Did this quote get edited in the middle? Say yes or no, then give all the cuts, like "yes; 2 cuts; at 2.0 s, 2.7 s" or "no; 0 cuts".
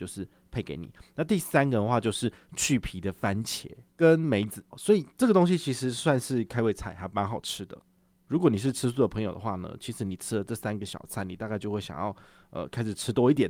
yes; 2 cuts; at 3.9 s, 4.7 s